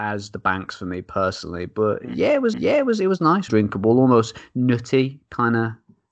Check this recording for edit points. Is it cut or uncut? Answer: cut